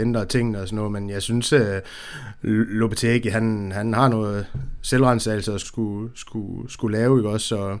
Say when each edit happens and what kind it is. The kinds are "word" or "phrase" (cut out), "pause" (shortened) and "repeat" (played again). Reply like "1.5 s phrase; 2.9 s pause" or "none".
5.6 s word